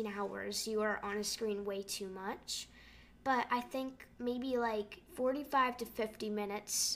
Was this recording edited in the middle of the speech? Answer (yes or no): yes